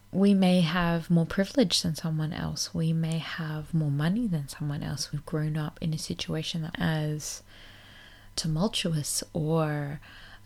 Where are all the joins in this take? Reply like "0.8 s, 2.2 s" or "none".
5.1 s, 6.7 s, 8.3 s